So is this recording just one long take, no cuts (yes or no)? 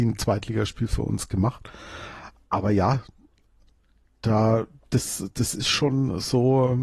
yes